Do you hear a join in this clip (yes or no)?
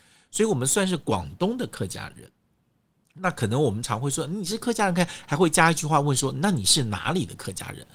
no